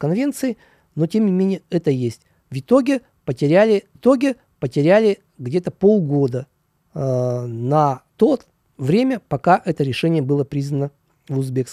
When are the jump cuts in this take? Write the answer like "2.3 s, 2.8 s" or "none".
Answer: 4.0 s, 6.8 s, 8.1 s